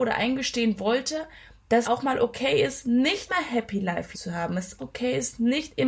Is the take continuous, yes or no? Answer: no